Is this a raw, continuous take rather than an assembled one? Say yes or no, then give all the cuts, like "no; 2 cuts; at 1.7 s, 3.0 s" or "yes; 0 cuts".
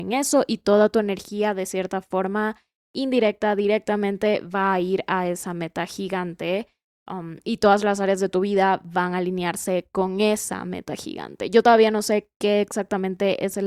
yes; 0 cuts